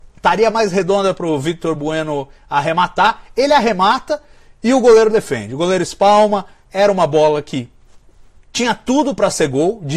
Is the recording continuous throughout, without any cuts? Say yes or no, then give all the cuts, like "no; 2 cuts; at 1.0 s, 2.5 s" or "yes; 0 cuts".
yes; 0 cuts